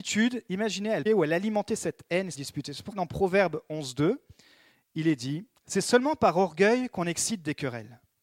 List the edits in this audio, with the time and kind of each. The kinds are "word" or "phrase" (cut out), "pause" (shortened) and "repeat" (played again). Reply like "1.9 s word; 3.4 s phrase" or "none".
1.1 s word; 2.3 s word; 2.9 s word